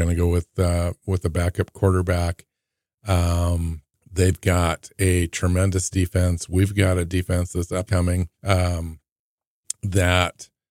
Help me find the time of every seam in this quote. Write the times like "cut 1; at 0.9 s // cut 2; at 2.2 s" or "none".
cut 1; at 3.9 s // cut 2; at 7.9 s // cut 3; at 8.3 s